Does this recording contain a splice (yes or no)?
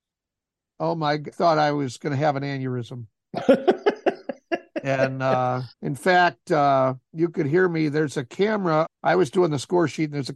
yes